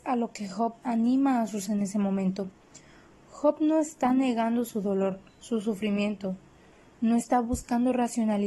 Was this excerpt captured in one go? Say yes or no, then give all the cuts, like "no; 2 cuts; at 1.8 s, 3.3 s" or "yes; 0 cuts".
no; 1 cut; at 1.7 s